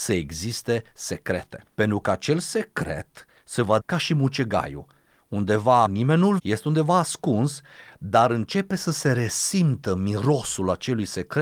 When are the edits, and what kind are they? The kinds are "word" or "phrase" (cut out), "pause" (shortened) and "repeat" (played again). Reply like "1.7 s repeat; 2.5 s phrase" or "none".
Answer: 3.8 s word; 5.9 s word; 6.4 s word